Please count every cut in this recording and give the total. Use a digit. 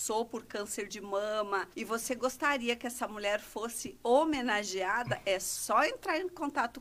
1